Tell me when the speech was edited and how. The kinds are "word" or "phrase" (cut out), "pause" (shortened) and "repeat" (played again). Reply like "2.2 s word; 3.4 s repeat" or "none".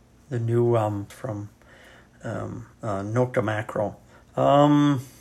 1.1 s word; 2.7 s pause; 4.1 s pause